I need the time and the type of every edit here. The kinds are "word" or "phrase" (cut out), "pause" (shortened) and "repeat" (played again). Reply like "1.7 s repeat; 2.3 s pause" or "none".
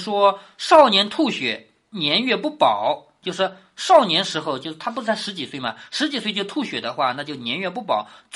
none